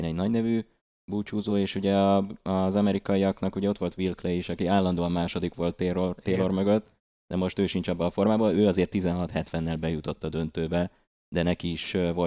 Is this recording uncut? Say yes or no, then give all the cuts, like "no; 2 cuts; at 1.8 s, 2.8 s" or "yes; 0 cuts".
yes; 0 cuts